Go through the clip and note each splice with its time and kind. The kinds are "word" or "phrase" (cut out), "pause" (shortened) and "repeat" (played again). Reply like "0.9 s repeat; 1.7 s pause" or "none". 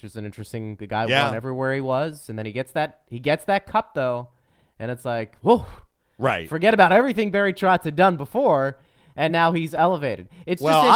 none

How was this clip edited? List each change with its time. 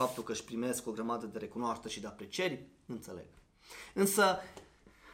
none

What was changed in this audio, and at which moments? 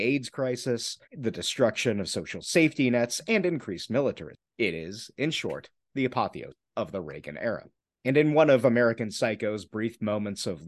1.1 s pause

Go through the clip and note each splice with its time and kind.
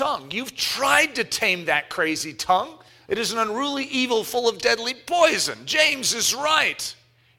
2.9 s pause

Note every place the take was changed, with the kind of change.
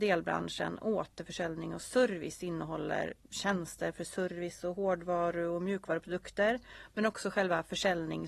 3.2 s pause

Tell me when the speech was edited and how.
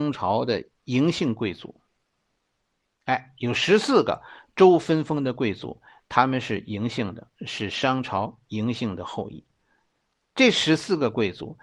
none

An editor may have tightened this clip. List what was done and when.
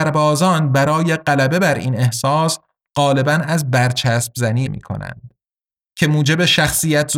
4.7 s word

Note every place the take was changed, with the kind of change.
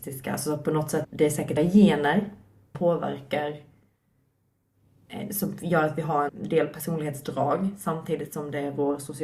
1.0 s word; 1.6 s word; 2.7 s word; 6.3 s word

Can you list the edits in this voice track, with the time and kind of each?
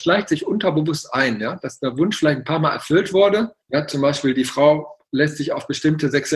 3.6 s pause

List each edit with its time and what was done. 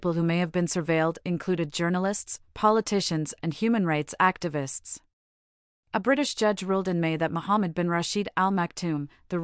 none

